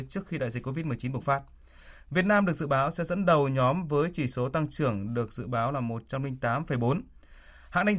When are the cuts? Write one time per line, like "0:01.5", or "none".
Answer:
none